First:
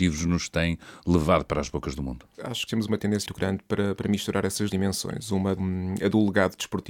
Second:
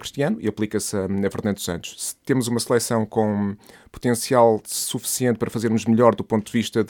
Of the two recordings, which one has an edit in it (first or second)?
first